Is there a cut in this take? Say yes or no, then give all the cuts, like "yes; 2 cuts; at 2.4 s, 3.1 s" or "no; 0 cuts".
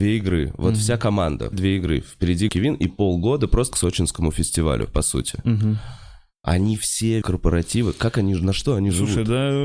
yes; 6 cuts; at 1.5 s, 2.5 s, 2.9 s, 3.7 s, 6.3 s, 7.2 s